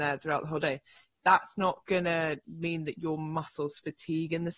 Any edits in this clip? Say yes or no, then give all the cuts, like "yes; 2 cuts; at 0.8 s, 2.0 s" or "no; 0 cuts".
no; 0 cuts